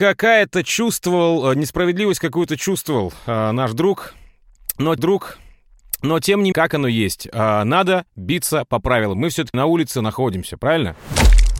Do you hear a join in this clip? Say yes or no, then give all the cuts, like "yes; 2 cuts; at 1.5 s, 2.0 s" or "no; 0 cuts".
yes; 3 cuts; at 5.0 s, 6.5 s, 9.5 s